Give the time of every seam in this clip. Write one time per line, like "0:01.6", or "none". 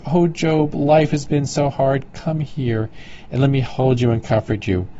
none